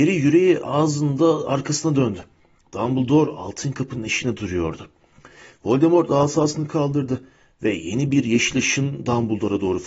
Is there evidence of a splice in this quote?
no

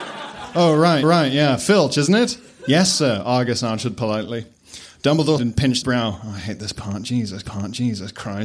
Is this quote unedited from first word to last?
no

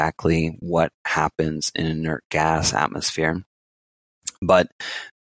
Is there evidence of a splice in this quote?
no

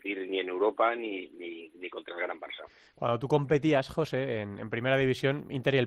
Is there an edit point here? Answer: no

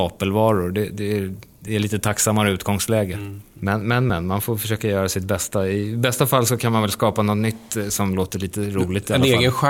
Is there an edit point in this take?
no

